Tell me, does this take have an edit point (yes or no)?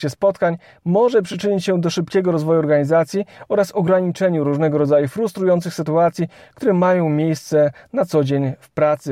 no